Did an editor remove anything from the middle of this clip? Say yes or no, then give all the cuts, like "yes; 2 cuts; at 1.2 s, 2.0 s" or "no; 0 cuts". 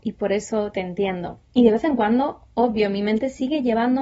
yes; 1 cut; at 1.5 s